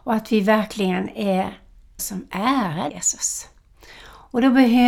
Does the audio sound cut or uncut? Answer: cut